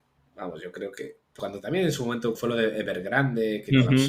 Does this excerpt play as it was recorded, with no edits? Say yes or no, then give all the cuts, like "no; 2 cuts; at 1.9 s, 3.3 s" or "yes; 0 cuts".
no; 2 cuts; at 1.4 s, 2.4 s